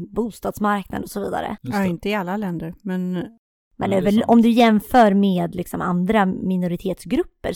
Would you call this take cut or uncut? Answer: uncut